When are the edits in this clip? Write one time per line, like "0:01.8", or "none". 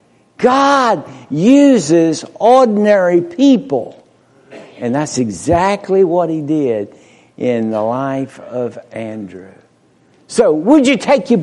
none